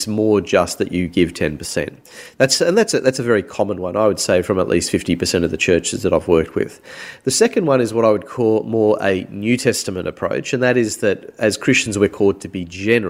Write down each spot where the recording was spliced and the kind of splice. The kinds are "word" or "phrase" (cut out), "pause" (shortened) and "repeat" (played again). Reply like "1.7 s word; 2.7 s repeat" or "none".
none